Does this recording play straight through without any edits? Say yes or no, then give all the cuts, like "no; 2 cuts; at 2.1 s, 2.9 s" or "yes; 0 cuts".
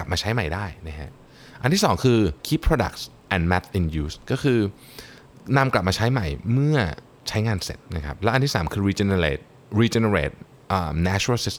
no; 2 cuts; at 2.4 s, 7.9 s